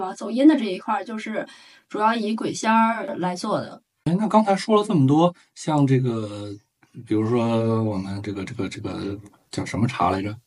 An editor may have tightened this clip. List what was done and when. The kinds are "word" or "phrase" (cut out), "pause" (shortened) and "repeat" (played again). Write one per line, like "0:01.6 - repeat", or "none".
none